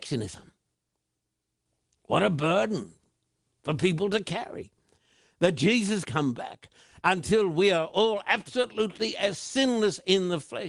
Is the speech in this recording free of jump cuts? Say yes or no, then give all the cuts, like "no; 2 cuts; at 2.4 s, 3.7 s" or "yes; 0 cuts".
no; 1 cut; at 6.1 s